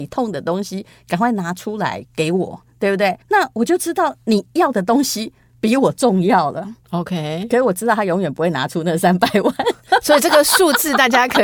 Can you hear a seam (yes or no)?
yes